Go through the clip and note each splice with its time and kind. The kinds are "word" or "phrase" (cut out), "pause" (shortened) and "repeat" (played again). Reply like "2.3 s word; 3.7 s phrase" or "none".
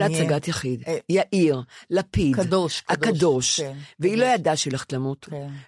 none